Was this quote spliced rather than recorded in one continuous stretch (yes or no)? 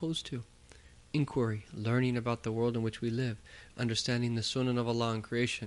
no